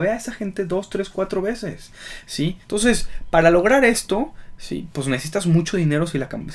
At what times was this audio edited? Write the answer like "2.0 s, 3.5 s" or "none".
2.6 s